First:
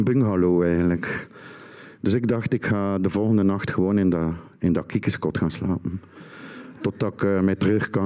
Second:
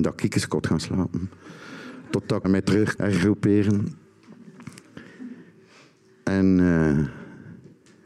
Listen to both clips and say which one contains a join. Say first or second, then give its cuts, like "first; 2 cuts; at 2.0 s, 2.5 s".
second; 2 cuts; at 2.4 s, 3.0 s